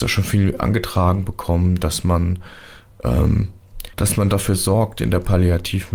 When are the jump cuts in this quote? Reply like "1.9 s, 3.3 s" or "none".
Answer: 3.9 s